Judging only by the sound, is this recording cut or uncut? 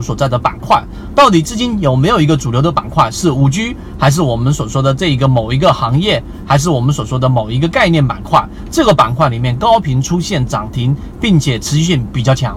uncut